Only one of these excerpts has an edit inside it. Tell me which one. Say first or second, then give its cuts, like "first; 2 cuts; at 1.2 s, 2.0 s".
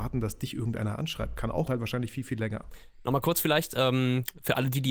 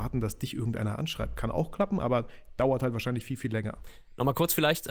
first; 1 cut; at 1.7 s